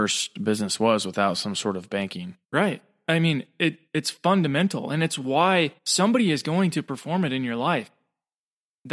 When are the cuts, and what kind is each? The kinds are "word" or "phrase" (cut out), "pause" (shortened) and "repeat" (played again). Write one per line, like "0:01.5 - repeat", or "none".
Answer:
0:02.4 - pause
0:03.9 - pause
0:05.8 - pause

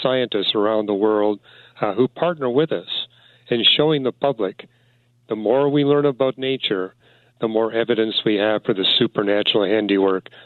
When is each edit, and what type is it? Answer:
none

